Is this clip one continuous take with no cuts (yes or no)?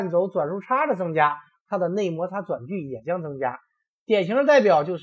yes